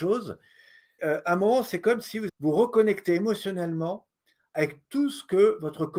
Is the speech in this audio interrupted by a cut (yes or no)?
yes